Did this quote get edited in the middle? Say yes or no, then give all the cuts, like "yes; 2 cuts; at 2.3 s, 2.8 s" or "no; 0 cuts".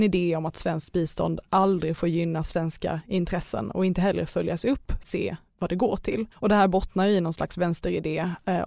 yes; 2 cuts; at 5.0 s, 6.3 s